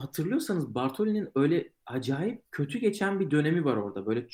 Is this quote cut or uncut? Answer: cut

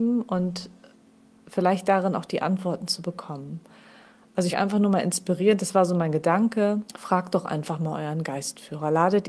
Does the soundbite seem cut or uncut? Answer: cut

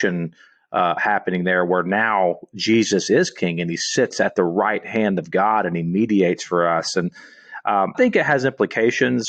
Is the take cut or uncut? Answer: cut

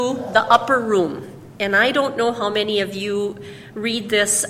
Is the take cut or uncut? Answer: uncut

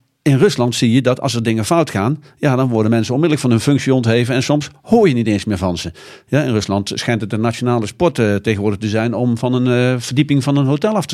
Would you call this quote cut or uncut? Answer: uncut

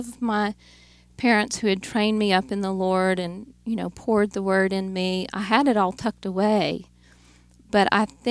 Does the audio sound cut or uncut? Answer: uncut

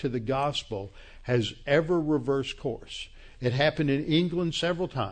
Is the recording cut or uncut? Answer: uncut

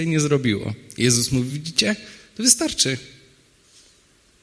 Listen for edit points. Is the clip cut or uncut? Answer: uncut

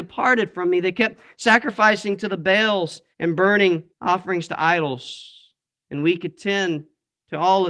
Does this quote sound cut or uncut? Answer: cut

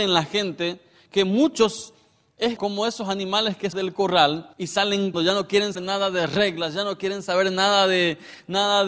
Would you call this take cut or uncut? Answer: cut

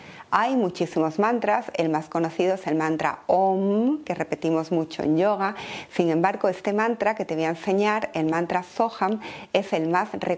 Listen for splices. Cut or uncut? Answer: uncut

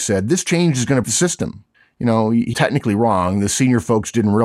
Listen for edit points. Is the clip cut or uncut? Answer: cut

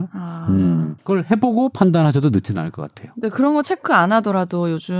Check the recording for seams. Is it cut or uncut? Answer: cut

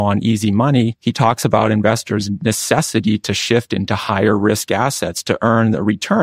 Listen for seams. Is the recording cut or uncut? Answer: cut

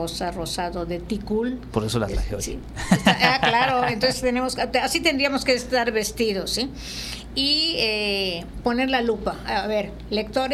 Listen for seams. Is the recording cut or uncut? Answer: uncut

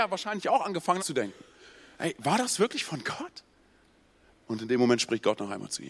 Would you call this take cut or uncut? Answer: cut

